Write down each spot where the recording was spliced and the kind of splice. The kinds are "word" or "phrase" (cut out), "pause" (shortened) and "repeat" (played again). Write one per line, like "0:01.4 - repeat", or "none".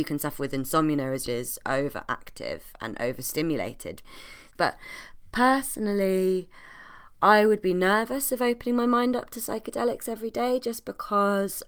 0:01.3 - phrase